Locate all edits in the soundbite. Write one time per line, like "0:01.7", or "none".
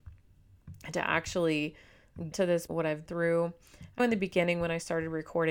0:02.3
0:02.7
0:03.1
0:04.0